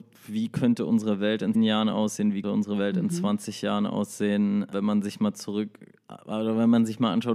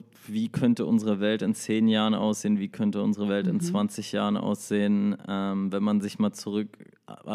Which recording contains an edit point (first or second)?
first